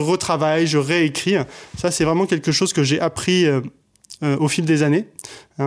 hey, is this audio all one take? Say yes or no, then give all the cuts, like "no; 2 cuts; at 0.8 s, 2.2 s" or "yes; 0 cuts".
yes; 0 cuts